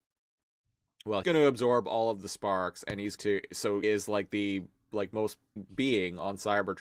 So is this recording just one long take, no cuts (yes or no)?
no